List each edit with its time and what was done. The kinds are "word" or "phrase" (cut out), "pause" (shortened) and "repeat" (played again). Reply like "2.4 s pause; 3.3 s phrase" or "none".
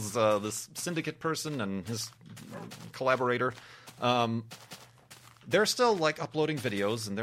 none